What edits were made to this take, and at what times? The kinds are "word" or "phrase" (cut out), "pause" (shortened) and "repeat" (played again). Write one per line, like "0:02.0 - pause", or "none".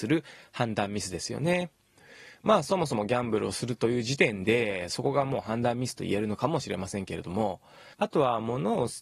0:07.9 - pause